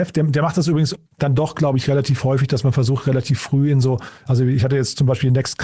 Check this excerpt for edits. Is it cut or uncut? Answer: cut